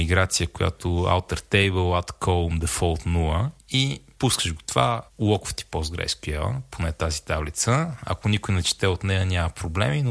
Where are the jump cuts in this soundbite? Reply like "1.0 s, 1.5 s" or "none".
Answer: none